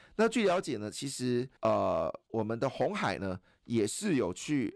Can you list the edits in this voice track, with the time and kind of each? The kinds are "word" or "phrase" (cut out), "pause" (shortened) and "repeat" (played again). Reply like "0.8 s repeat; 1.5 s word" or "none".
1.6 s pause